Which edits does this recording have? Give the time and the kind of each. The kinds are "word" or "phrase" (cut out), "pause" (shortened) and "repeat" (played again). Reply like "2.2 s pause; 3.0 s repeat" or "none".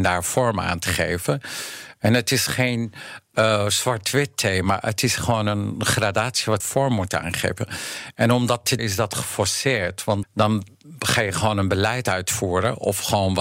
6.6 s phrase; 8.8 s word; 10.2 s word